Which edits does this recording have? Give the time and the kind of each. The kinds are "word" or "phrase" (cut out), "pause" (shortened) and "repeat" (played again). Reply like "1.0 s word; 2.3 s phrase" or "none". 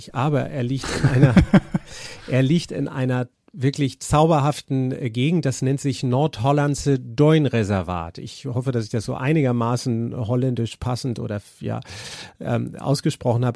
none

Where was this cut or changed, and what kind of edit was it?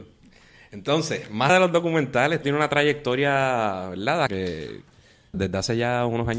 1.5 s word; 2.4 s word; 4.3 s word; 5.3 s word

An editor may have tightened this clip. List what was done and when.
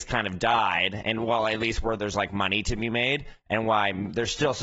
none

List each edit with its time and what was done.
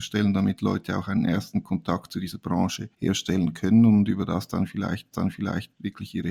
2.9 s pause; 5.1 s repeat

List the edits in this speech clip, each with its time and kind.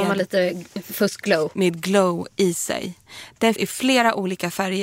1.5 s word; 3.6 s word

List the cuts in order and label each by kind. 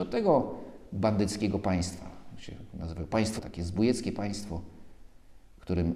3.4 s word

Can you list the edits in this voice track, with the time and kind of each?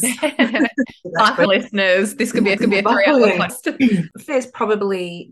1.5 s word; 2.6 s repeat; 3.5 s phrase; 4.3 s word

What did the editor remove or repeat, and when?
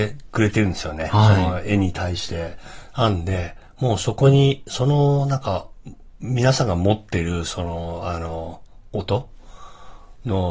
none

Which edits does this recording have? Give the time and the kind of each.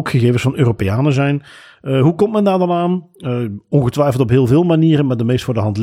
none

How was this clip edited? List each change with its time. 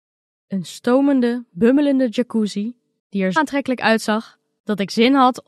3.4 s word

